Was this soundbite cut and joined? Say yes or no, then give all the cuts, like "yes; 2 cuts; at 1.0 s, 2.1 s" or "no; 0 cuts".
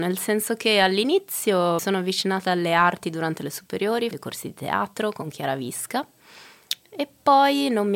yes; 2 cuts; at 1.8 s, 4.1 s